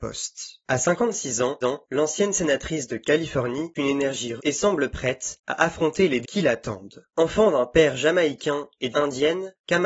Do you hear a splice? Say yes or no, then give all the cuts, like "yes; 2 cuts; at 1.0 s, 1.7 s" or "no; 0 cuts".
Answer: yes; 5 cuts; at 1.6 s, 3.7 s, 4.4 s, 6.2 s, 8.9 s